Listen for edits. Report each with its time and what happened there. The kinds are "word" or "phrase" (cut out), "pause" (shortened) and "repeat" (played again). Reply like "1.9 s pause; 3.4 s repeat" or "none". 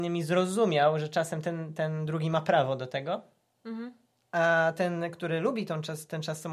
none